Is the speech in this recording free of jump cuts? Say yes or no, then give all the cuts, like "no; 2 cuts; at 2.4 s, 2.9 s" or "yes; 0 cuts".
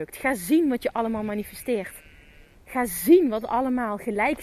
yes; 0 cuts